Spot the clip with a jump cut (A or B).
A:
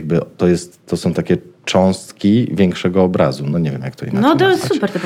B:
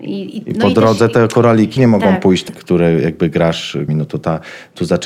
B